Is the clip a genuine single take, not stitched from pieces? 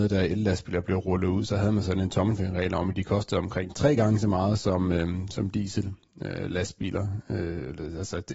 yes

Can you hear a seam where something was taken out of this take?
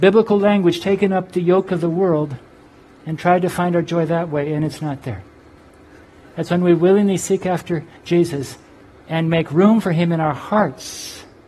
no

